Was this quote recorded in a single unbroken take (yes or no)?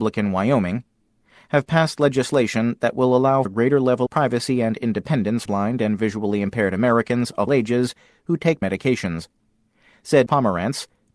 no